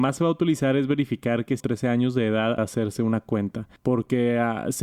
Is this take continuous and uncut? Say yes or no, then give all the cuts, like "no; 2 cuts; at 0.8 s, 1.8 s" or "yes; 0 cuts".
no; 3 cuts; at 1.6 s, 2.6 s, 3.8 s